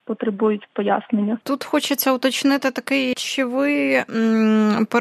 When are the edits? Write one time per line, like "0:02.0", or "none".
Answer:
0:01.4
0:03.1